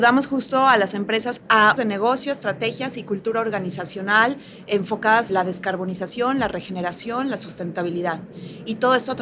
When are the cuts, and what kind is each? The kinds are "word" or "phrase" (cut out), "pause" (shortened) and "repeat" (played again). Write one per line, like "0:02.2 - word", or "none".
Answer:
0:01.4 - phrase
0:01.8 - word
0:05.3 - word